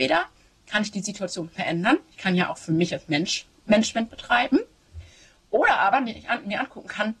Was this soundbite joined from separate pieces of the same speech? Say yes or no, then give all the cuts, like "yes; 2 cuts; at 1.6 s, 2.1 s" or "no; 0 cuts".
no; 0 cuts